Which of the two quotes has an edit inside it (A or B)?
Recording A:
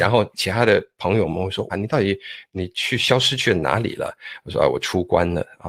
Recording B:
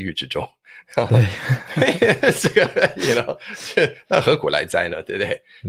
A